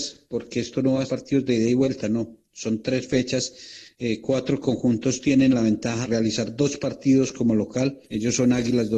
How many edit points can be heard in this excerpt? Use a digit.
3